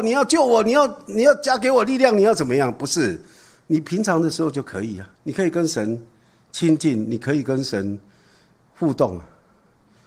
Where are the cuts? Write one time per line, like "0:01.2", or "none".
0:05.1